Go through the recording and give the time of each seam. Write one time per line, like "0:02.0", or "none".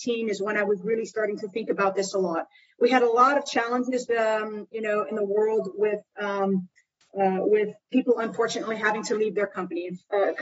none